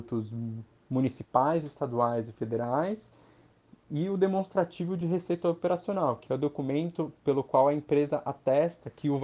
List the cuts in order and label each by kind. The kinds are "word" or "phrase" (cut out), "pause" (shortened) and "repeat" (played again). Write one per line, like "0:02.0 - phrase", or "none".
none